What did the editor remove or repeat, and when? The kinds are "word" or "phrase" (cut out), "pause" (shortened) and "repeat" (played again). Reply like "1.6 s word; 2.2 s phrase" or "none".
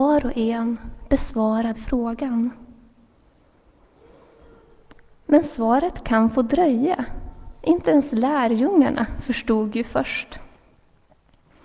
1.7 s word